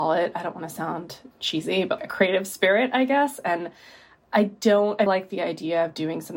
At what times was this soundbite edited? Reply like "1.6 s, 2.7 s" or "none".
1.3 s, 2.0 s, 5.1 s